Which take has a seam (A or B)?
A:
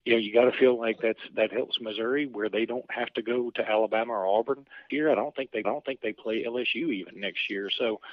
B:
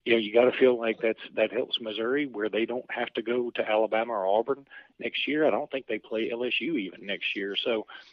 A